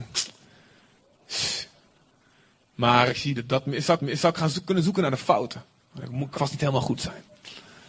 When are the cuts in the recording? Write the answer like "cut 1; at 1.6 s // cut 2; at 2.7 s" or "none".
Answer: cut 1; at 3.1 s // cut 2; at 4.0 s // cut 3; at 6.4 s